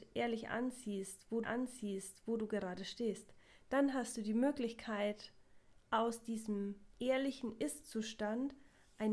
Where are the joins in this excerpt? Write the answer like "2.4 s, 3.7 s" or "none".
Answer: 1.4 s